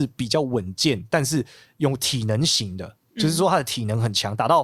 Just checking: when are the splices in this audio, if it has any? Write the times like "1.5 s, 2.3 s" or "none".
none